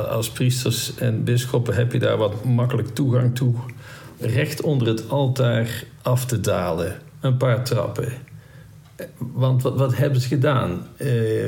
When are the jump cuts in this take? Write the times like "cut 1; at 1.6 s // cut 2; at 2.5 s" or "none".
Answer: cut 1; at 4.2 s // cut 2; at 6.0 s